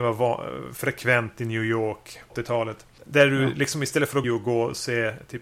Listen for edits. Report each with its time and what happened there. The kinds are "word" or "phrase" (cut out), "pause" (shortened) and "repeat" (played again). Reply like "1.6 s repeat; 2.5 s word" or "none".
2.3 s word; 4.2 s phrase